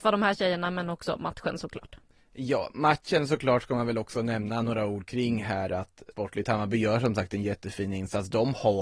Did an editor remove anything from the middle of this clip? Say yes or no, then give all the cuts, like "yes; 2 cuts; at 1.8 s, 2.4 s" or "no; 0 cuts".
yes; 1 cut; at 6.1 s